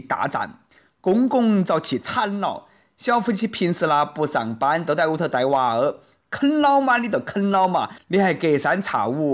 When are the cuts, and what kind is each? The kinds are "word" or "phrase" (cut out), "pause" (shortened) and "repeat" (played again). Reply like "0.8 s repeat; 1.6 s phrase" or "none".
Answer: none